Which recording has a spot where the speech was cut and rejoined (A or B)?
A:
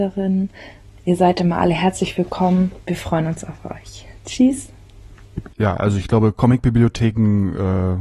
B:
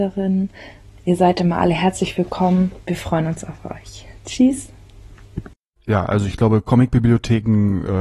A